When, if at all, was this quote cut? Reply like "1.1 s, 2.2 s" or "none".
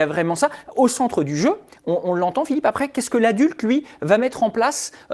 none